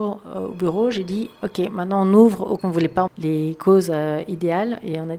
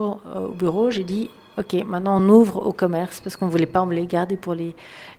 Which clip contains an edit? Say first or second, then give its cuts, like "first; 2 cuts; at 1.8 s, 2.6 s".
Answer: first; 3 cuts; at 1.4 s, 2.6 s, 3.1 s